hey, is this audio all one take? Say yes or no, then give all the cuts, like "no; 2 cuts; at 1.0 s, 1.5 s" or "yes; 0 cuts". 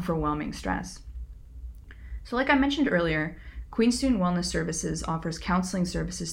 yes; 0 cuts